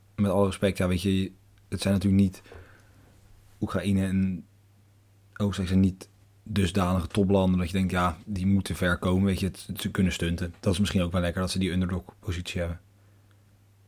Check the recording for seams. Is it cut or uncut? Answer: uncut